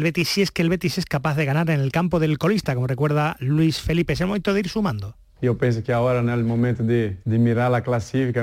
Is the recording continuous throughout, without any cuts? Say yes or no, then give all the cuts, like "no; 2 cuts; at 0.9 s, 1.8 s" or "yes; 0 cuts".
yes; 0 cuts